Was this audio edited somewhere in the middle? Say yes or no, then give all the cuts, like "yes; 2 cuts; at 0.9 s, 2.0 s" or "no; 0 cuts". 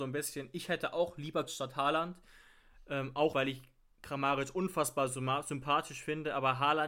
yes; 2 cuts; at 1.5 s, 3.3 s